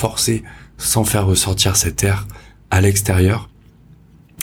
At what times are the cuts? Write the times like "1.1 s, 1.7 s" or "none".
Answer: none